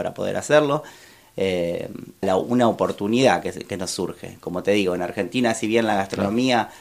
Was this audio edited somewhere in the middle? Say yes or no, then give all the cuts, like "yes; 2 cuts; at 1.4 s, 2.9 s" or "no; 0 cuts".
yes; 1 cut; at 2.2 s